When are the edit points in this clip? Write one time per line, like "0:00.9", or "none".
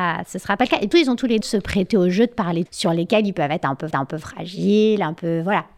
0:00.9
0:01.4
0:02.7
0:03.9